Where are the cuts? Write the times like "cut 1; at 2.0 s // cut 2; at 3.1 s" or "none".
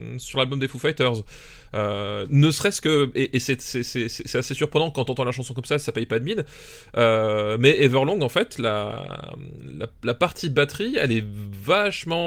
none